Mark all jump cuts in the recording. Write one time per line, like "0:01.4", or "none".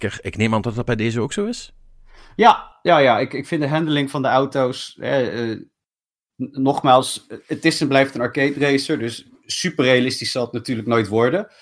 none